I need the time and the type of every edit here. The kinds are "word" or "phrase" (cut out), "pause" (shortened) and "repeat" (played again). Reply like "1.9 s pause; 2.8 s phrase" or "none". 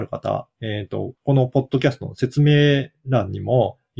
1.2 s pause

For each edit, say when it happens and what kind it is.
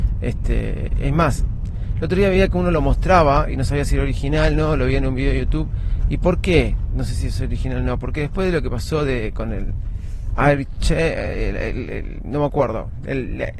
none

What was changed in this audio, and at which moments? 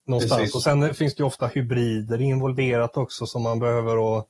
none

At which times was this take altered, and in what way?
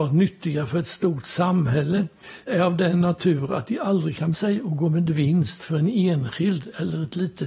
2.5 s word; 4.3 s word

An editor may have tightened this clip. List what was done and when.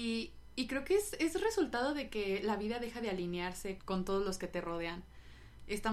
3.8 s word

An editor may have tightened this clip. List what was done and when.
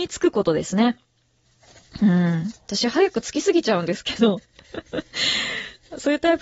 2.6 s pause

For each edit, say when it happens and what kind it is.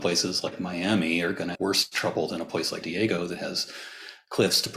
1.5 s word; 2.8 s word

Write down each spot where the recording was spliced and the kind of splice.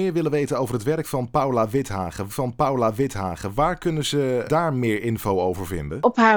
2.3 s repeat; 4.5 s word

